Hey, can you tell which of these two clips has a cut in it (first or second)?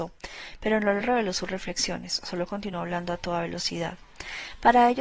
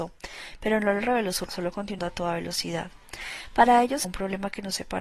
second